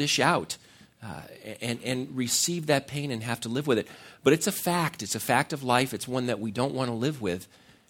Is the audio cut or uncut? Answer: uncut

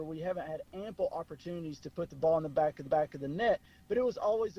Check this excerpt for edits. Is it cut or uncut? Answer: cut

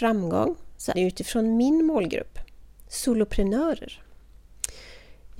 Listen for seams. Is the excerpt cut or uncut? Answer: cut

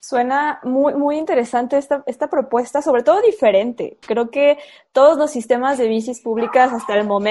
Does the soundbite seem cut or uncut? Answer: cut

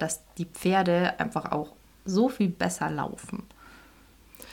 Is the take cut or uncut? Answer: uncut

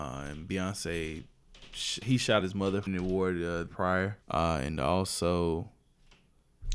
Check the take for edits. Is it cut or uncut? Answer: cut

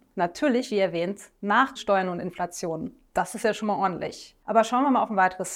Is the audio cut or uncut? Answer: cut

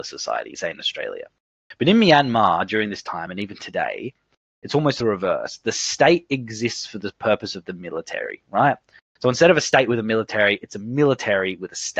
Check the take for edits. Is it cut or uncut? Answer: uncut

